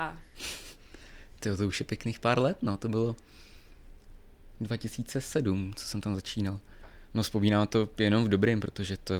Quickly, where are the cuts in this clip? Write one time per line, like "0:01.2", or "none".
none